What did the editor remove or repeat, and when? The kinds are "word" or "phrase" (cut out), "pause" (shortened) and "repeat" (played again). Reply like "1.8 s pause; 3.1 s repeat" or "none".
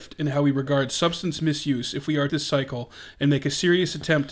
2.3 s word